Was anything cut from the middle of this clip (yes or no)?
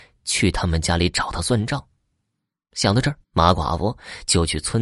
yes